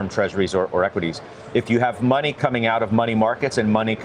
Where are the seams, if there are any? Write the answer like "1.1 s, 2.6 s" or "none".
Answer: none